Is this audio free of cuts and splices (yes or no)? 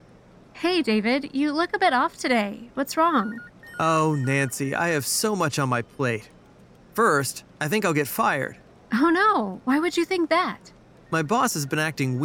yes